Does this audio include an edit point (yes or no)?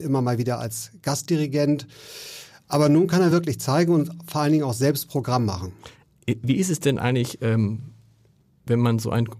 no